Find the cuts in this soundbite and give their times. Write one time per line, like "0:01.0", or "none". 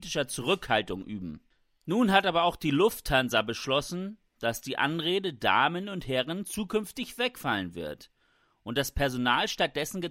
none